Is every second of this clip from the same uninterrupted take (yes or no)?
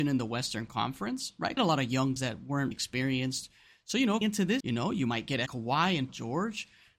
no